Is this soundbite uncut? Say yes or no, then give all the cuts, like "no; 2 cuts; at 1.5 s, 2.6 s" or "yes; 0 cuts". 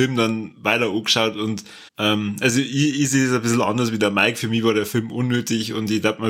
no; 1 cut; at 1.9 s